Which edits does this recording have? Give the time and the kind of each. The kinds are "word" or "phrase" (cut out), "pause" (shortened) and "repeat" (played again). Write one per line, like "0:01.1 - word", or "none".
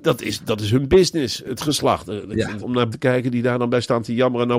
0:01.6 - word
0:02.6 - phrase
0:02.9 - word